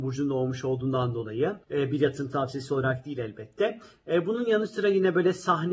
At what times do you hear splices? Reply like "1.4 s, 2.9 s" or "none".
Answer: 1.6 s